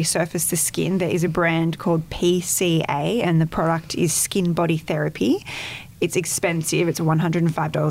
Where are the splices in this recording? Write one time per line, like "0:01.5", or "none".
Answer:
none